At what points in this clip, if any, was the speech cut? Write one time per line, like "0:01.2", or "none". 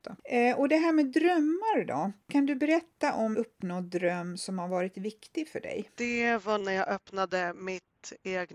0:03.3
0:06.6